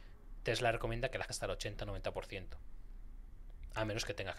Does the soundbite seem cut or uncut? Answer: cut